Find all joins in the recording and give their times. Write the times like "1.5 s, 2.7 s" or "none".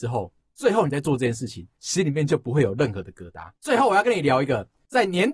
1.7 s, 3.5 s